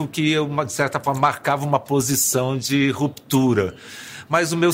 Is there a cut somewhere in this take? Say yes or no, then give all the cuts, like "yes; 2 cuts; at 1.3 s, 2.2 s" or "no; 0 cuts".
no; 0 cuts